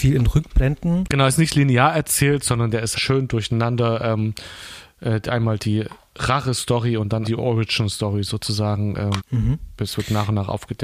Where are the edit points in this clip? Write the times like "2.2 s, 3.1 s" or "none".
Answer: 2.9 s, 7.2 s, 9.2 s